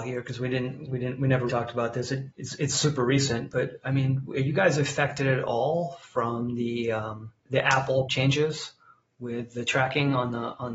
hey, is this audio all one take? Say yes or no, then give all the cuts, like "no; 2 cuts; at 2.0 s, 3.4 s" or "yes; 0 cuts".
no; 4 cuts; at 1.5 s, 2.3 s, 7.4 s, 8.1 s